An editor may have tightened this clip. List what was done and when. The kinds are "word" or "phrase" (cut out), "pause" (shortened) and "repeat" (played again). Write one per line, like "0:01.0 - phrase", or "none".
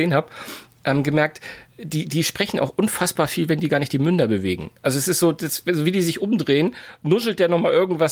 0:01.7 - pause